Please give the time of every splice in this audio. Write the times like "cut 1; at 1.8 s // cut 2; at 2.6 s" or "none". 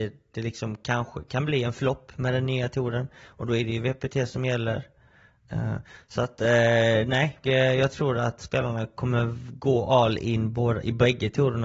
cut 1; at 7.4 s